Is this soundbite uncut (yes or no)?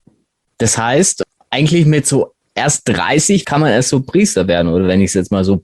yes